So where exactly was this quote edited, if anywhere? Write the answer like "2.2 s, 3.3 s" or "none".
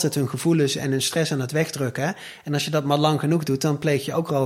none